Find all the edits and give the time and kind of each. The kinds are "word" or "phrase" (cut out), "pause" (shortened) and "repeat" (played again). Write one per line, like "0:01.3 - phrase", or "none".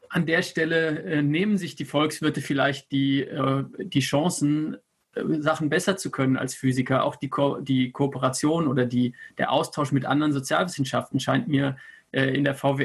none